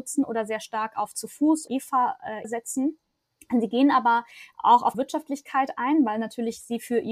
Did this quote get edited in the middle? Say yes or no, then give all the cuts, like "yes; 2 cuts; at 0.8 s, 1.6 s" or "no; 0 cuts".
yes; 3 cuts; at 1.7 s, 2.4 s, 4.9 s